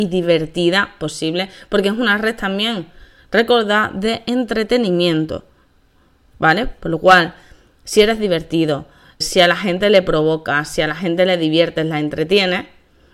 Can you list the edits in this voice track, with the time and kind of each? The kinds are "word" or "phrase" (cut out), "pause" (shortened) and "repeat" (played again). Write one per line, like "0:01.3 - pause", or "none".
0:09.2 - word